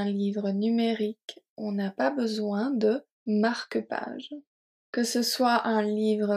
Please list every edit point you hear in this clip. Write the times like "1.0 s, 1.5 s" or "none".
3.1 s